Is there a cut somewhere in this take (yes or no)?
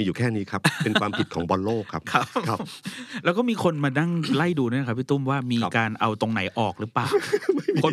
no